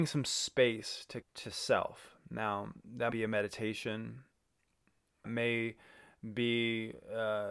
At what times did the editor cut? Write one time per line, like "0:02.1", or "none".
0:01.2
0:03.1
0:05.2